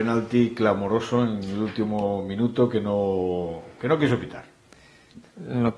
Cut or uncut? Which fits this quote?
uncut